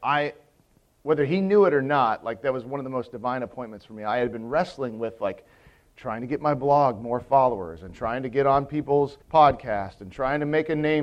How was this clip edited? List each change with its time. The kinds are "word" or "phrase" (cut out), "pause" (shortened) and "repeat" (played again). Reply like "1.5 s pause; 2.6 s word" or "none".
9.2 s pause